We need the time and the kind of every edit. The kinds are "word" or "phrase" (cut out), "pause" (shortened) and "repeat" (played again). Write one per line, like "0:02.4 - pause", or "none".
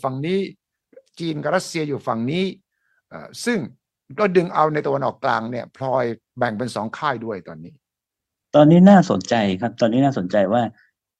none